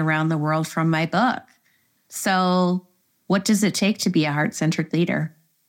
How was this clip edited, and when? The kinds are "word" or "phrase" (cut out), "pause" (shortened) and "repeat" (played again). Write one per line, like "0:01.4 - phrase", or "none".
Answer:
none